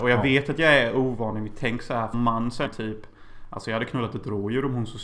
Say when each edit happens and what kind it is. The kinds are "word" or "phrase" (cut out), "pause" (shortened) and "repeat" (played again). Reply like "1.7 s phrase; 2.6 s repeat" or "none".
2.1 s word; 2.7 s word